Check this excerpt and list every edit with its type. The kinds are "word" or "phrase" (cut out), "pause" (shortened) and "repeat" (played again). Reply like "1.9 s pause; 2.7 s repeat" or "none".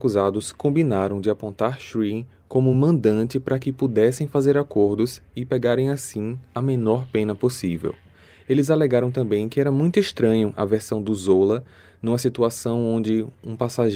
none